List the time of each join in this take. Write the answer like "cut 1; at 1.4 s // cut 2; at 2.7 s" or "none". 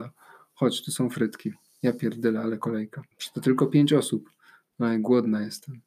cut 1; at 3.1 s